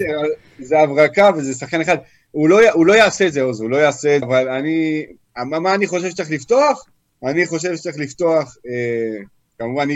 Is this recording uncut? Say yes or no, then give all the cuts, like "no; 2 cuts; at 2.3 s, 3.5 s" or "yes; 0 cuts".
no; 1 cut; at 4.2 s